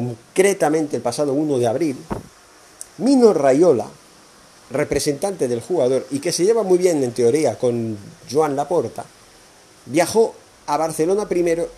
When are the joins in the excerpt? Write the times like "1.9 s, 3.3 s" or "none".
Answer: 2.9 s, 9.5 s